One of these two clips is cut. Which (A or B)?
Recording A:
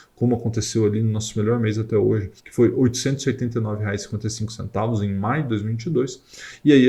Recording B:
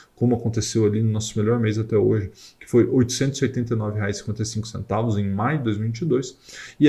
A